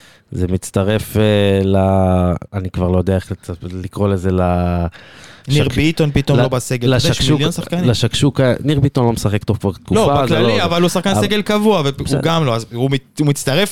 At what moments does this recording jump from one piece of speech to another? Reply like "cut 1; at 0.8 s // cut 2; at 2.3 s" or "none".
cut 1; at 2.5 s

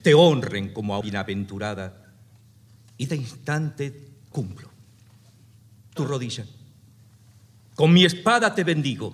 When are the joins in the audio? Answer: cut 1; at 1.0 s // cut 2; at 3.1 s // cut 3; at 4.3 s // cut 4; at 6.0 s

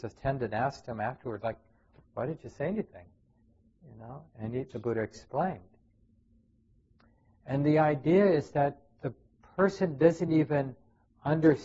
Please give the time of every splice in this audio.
none

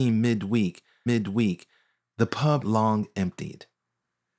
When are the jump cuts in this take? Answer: cut 1; at 1.1 s // cut 2; at 2.6 s

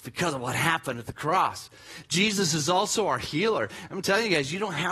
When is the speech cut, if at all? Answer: none

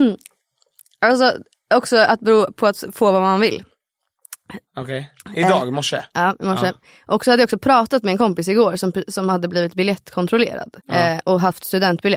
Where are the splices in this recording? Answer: cut 1; at 5.2 s // cut 2; at 10.8 s

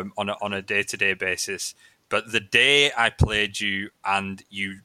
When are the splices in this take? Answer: none

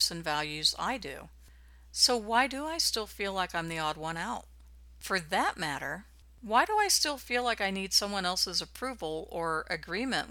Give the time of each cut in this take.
none

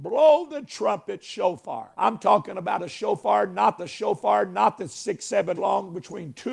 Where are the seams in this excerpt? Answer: cut 1; at 1.9 s // cut 2; at 3.8 s // cut 3; at 5.5 s

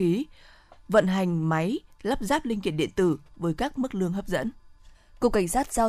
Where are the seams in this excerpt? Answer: cut 1; at 4.9 s

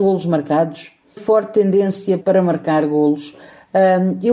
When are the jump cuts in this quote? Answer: cut 1; at 1.2 s // cut 2; at 2.2 s

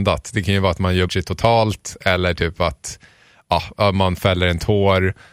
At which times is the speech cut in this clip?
cut 1; at 1.1 s

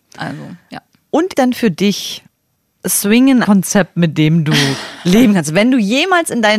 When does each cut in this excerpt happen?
cut 1; at 1.3 s // cut 2; at 3.4 s

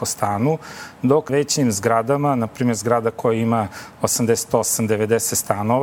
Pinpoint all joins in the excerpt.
cut 1; at 1.3 s

